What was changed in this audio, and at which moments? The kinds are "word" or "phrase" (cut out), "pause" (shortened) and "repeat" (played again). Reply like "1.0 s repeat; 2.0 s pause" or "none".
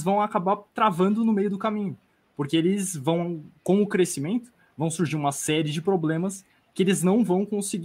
none